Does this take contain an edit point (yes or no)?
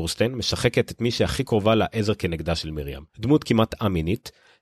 yes